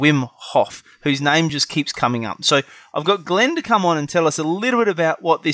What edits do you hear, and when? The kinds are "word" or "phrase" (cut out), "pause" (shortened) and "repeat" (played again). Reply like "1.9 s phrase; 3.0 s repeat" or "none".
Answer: none